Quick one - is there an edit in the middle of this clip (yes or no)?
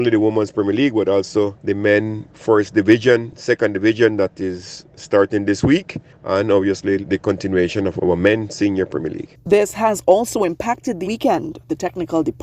yes